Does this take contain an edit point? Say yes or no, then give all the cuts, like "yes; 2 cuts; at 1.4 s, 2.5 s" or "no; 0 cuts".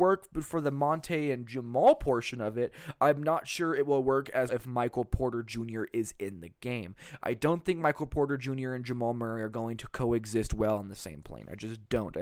yes; 1 cut; at 4.5 s